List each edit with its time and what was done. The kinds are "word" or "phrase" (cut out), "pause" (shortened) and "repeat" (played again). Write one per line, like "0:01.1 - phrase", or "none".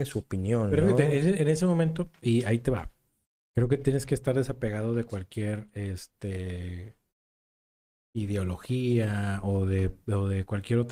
none